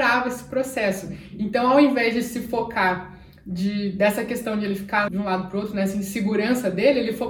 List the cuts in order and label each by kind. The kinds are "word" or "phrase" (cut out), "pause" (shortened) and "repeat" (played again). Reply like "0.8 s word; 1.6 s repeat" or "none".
5.1 s word